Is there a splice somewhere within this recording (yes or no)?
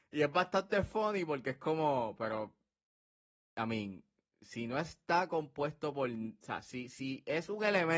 no